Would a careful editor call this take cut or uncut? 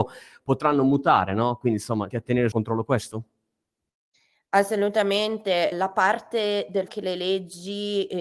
cut